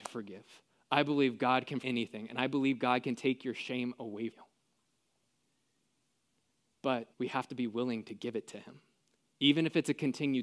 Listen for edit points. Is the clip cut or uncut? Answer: cut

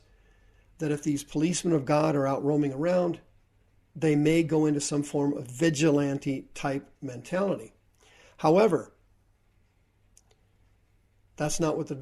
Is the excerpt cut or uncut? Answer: cut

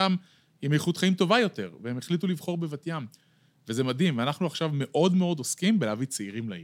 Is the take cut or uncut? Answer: uncut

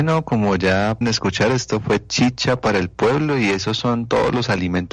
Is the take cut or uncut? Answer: cut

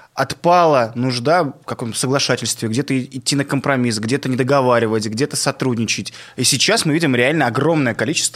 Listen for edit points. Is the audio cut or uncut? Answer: uncut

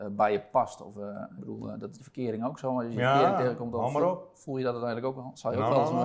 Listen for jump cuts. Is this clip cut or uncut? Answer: cut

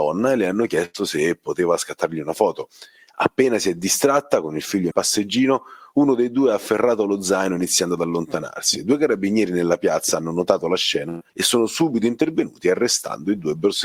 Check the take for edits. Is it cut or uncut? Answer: cut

